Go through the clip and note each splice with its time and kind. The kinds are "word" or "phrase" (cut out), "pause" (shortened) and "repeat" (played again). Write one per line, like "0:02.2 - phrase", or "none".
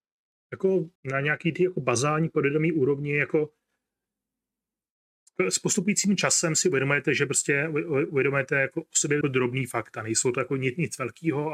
0:01.0 - pause
0:09.2 - phrase